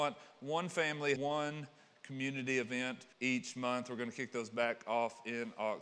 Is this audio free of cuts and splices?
no; 2 cuts; at 1.2 s, 3.1 s

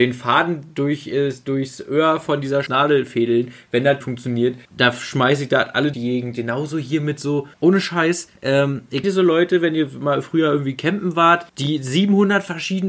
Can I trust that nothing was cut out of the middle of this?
no; 8 cuts; at 2.7 s, 4.0 s, 4.7 s, 5.9 s, 7.5 s, 8.4 s, 9.0 s, 11.5 s

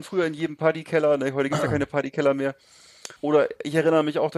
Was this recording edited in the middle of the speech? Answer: yes; 1 cut; at 3.2 s

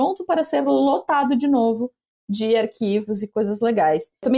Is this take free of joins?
yes; 0 cuts

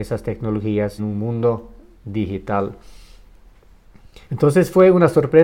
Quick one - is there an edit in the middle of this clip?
yes; 2 cuts; at 1.0 s, 4.2 s

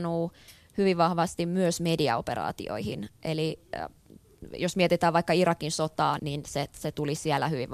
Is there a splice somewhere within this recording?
yes; 1 cut; at 6.2 s

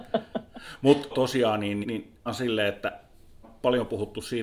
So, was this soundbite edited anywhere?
yes; 4 cuts; at 1.1 s, 1.8 s, 2.3 s, 3.4 s

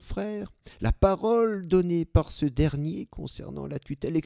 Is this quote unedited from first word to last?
yes; 0 cuts

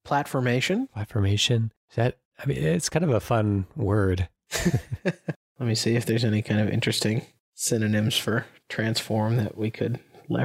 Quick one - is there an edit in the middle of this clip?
no; 0 cuts

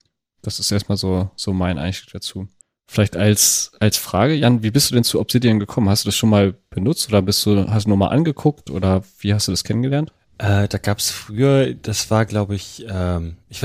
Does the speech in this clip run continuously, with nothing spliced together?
no; 1 cut; at 2.6 s

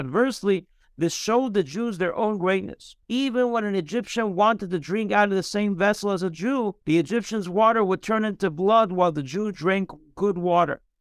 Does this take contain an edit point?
yes; 2 cuts; at 3.0 s, 6.8 s

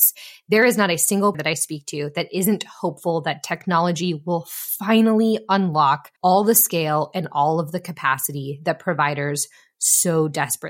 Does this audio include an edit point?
yes; 2 cuts; at 1.3 s, 6.2 s

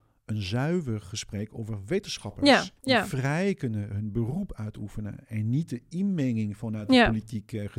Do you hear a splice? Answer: yes; 1 cut; at 2.8 s

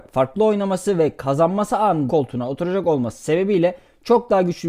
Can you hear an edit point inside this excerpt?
yes; 1 cut; at 2.1 s

